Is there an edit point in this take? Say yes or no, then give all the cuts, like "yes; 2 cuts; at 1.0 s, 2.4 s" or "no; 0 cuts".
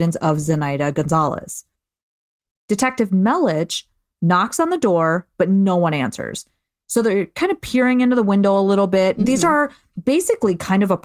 no; 0 cuts